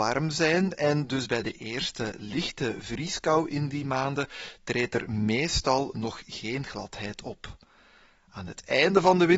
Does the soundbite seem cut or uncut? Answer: uncut